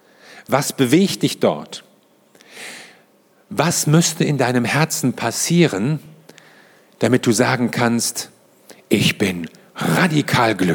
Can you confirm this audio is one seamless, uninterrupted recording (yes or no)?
yes